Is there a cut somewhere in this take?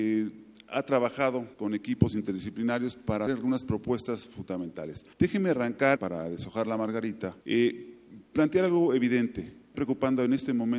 yes; 6 cuts; at 1.5 s, 3.3 s, 5.1 s, 6.0 s, 7.4 s, 9.7 s

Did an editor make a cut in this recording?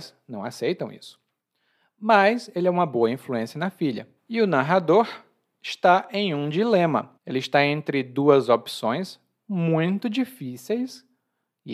yes; 3 cuts; at 1.4 s, 4.2 s, 7.2 s

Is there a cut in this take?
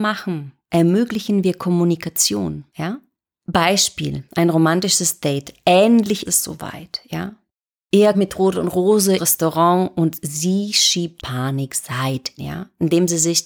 yes; 7 cuts; at 2.7 s, 4.3 s, 6.3 s, 8.1 s, 9.2 s, 11.2 s, 12.4 s

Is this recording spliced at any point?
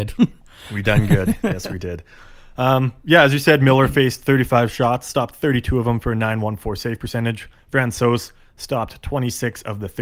no; 0 cuts

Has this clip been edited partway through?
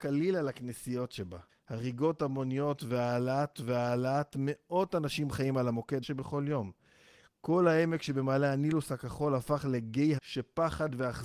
yes; 4 cuts; at 1.5 s, 3.5 s, 6.0 s, 10.2 s

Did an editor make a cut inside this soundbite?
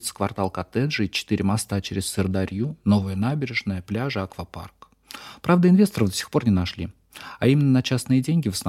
no; 0 cuts

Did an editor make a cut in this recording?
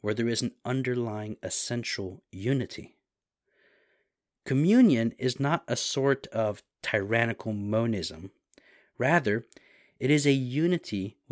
no; 0 cuts

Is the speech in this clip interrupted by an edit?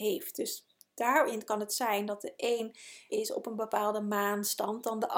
yes; 1 cut; at 3.1 s

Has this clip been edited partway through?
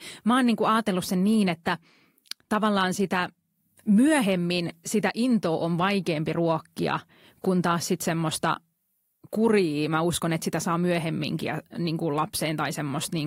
no; 0 cuts

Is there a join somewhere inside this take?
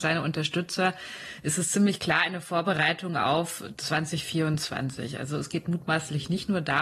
no; 0 cuts

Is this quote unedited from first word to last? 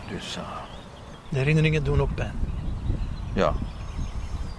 no; 1 cut; at 2.1 s

